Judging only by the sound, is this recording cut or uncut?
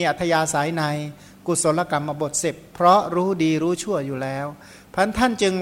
uncut